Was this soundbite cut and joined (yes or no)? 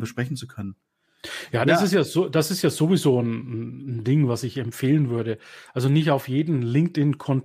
no